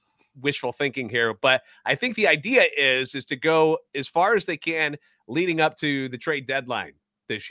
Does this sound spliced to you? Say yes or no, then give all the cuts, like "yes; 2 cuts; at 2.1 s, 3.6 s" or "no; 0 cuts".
no; 0 cuts